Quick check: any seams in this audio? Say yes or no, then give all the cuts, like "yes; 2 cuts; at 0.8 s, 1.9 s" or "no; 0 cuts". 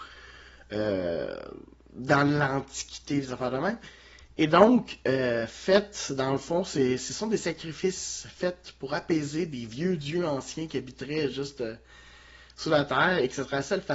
no; 0 cuts